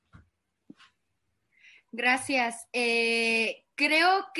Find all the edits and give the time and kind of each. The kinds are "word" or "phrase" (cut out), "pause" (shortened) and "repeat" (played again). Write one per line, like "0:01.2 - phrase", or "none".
none